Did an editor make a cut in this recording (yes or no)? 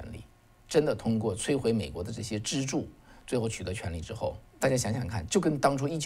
yes